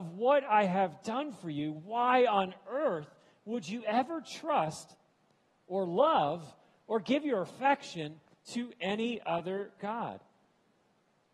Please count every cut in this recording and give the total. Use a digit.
0